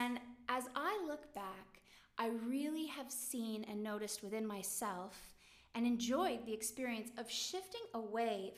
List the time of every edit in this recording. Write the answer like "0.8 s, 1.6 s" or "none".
none